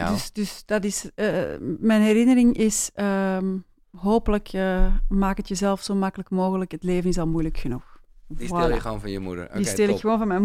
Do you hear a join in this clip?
no; 0 cuts

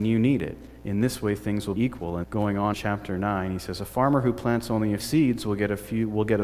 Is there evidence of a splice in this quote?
yes; 4 cuts; at 1.8 s, 2.2 s, 2.7 s, 5.0 s

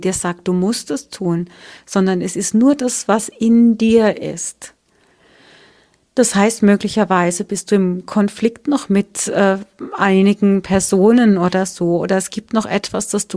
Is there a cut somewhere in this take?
no; 0 cuts

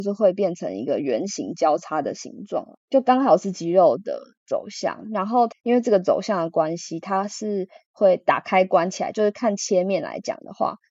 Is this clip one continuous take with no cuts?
no; 1 cut; at 2.8 s

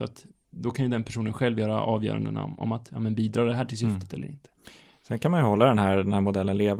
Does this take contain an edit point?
no; 0 cuts

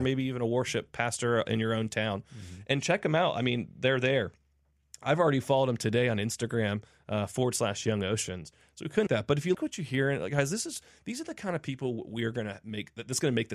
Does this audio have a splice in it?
yes; 3 cuts; at 1.5 s, 9.1 s, 9.5 s

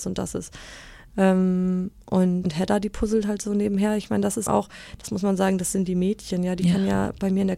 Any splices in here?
yes; 2 cuts; at 2.4 s, 4.5 s

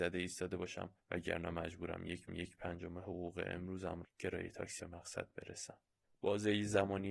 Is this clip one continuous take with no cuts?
no; 5 cuts; at 1.0 s, 2.3 s, 4.0 s, 4.8 s, 6.0 s

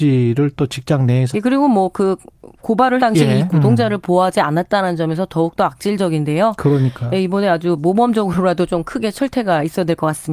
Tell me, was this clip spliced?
yes; 3 cuts; at 1.3 s, 3.0 s, 3.5 s

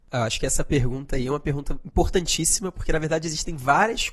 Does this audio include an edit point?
no; 0 cuts

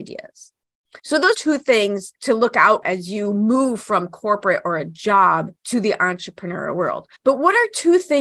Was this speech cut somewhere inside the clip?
yes; 6 cuts; at 1.0 s, 1.3 s, 2.2 s, 2.8 s, 5.6 s, 7.2 s

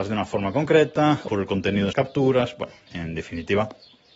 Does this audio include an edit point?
yes; 3 cuts; at 1.3 s, 1.9 s, 2.9 s

